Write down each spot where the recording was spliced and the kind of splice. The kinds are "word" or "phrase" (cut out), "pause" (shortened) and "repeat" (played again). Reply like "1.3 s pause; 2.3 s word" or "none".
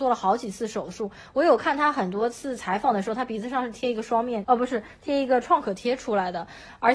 4.4 s word